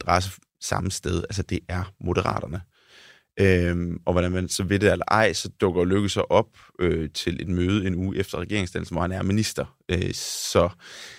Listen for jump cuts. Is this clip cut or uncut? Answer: uncut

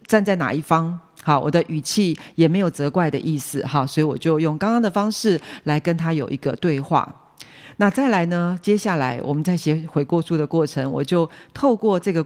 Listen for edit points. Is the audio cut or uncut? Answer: uncut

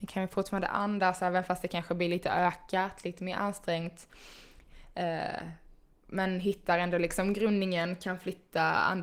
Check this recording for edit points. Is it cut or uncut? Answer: uncut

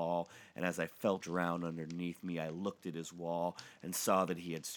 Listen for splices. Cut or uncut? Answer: cut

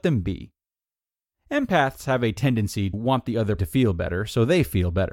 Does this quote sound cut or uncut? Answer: cut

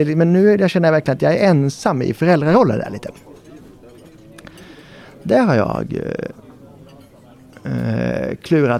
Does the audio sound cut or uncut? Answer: uncut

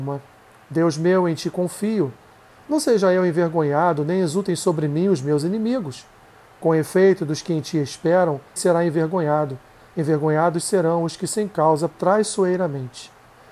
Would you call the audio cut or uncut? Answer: cut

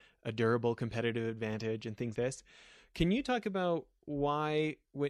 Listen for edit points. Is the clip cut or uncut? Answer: cut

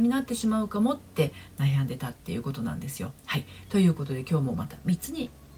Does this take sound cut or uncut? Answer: cut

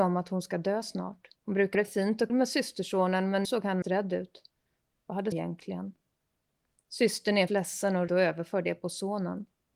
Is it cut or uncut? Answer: cut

